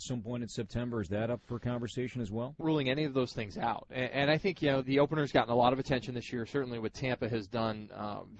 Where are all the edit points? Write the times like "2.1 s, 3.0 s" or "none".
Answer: 2.6 s, 4.8 s